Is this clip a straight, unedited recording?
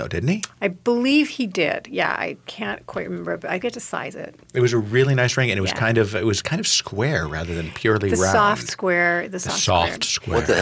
no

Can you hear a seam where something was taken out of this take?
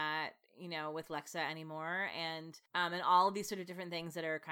yes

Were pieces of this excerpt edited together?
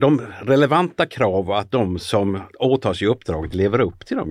no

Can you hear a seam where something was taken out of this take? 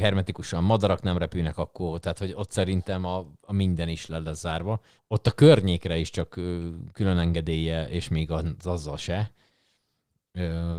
yes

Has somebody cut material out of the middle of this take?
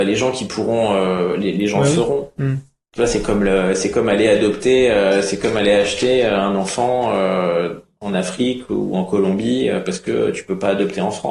no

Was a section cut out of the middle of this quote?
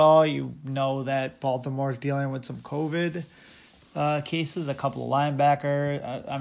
no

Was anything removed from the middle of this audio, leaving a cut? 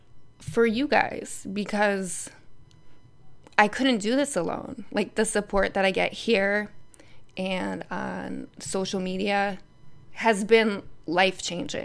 yes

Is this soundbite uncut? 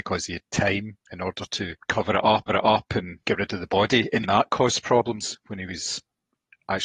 no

